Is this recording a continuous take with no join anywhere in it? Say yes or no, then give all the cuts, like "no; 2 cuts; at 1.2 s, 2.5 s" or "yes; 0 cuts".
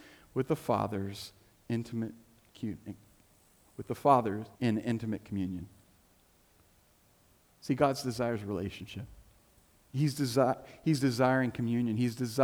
no; 1 cut; at 4.5 s